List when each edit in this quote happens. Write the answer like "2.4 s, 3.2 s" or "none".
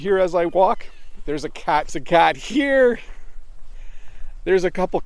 1.9 s